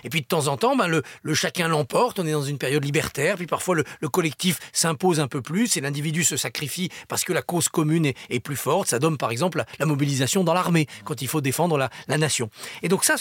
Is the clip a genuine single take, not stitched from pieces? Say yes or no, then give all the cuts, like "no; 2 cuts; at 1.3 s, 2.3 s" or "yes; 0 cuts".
yes; 0 cuts